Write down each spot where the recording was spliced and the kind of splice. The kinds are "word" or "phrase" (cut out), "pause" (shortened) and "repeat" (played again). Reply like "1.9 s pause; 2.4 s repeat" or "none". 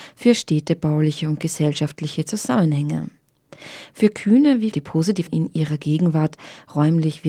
4.7 s phrase; 5.3 s word